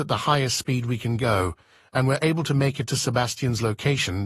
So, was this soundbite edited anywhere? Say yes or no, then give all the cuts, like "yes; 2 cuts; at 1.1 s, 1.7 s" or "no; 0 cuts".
no; 0 cuts